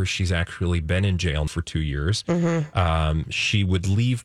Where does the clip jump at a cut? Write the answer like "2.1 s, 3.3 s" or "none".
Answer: 1.5 s

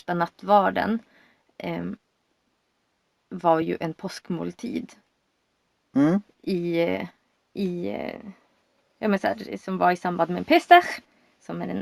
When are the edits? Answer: none

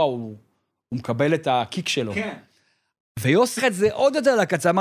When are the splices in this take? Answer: 3.6 s

